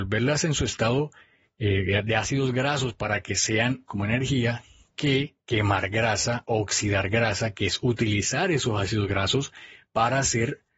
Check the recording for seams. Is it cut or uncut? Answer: cut